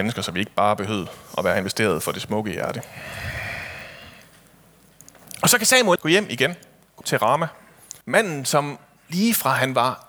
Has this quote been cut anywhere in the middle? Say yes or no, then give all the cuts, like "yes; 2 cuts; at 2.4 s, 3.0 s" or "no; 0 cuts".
yes; 3 cuts; at 6.0 s, 7.0 s, 8.0 s